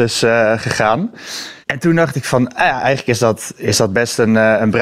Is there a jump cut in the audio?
yes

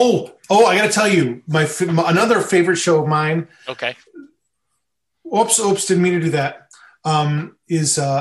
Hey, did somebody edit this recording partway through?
no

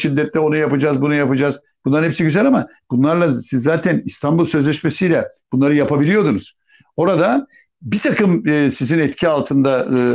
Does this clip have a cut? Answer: no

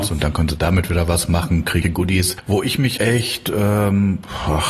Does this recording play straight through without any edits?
no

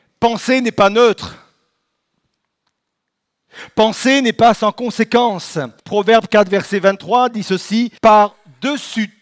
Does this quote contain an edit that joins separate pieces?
yes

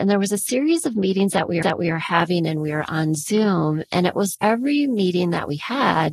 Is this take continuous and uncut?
no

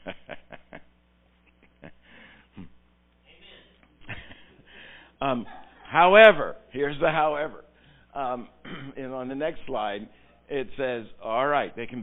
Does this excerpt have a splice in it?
no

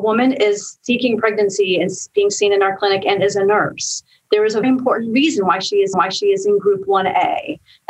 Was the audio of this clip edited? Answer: yes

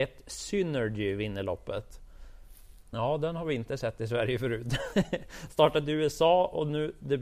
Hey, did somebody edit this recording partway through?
yes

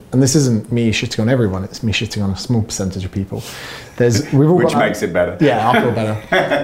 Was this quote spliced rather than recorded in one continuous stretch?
no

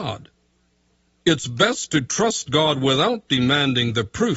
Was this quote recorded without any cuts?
yes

